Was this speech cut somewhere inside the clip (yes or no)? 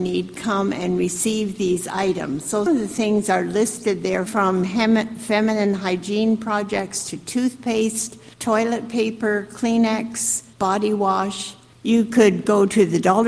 yes